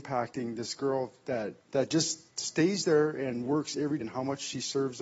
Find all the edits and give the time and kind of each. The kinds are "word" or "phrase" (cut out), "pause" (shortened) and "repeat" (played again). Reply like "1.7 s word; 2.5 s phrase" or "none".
1.6 s pause; 2.3 s pause; 4.0 s word